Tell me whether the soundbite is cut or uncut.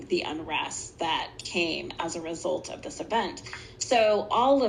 uncut